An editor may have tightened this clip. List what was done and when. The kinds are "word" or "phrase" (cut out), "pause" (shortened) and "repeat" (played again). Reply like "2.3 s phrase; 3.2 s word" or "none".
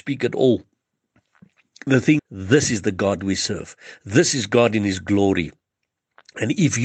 2.2 s word

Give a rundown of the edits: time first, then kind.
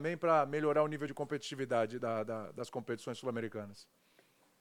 none

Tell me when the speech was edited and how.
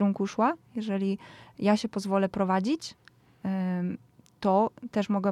none

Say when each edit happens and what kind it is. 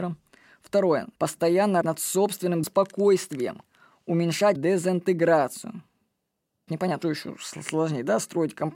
1.2 s word; 1.8 s word; 2.6 s word; 4.6 s word; 6.7 s word; 7.0 s word

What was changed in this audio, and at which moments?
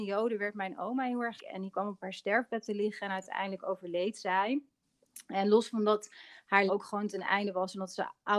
1.4 s word; 6.7 s word

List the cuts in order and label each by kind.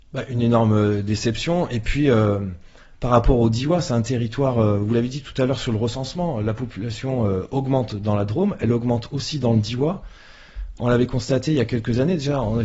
none

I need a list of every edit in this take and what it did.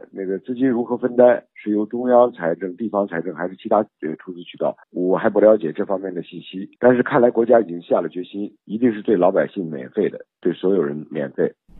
4.8 s pause; 6.8 s pause; 8.6 s pause

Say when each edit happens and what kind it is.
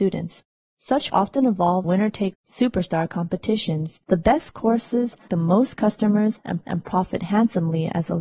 1.1 s word; 1.8 s word; 2.3 s word; 4.0 s pause; 5.3 s word; 6.6 s repeat

